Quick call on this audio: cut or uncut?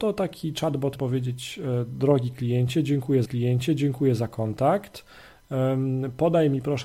cut